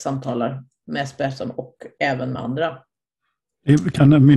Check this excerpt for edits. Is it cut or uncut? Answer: uncut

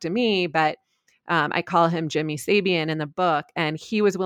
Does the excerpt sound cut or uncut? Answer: uncut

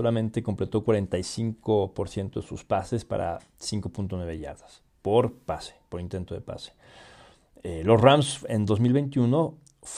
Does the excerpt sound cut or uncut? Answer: uncut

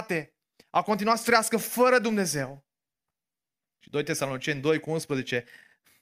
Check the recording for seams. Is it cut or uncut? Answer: uncut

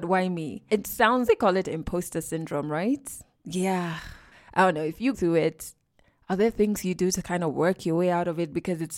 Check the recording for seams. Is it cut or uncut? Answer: cut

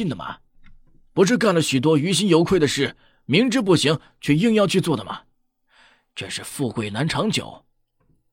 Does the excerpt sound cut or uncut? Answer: uncut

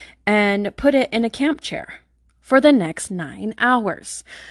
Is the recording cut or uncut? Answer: uncut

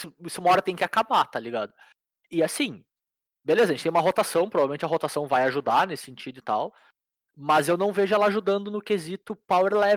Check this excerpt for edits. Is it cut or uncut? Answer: uncut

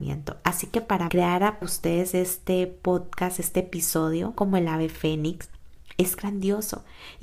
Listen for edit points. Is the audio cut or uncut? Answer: cut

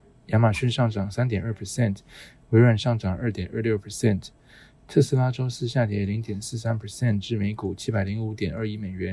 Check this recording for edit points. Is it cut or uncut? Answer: uncut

